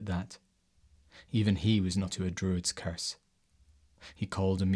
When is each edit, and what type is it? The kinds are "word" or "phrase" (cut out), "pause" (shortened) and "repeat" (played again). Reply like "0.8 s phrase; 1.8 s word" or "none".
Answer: 2.1 s word